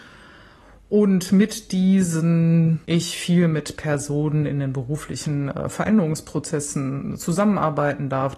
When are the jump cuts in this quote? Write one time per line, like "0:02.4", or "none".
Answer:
0:02.8